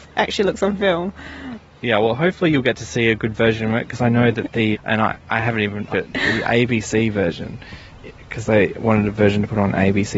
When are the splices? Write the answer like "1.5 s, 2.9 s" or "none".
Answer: 4.7 s, 5.9 s